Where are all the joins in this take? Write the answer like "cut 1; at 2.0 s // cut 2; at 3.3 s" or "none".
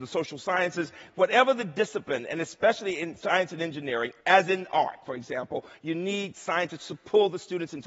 cut 1; at 4.2 s